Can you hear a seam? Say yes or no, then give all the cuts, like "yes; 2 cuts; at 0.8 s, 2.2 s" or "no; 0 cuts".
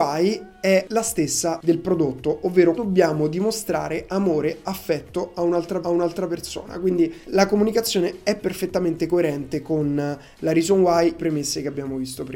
yes; 4 cuts; at 2.7 s, 5.8 s, 7.2 s, 11.2 s